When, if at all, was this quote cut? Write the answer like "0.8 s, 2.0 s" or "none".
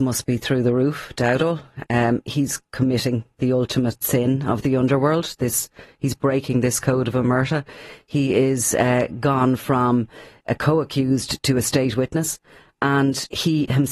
none